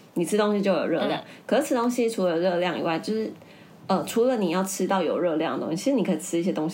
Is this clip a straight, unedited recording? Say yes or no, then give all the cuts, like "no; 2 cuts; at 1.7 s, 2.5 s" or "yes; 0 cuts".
yes; 0 cuts